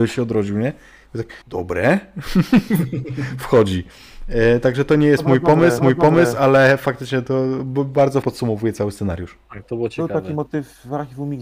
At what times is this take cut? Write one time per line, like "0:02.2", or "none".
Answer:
0:01.4
0:05.8
0:08.2
0:09.4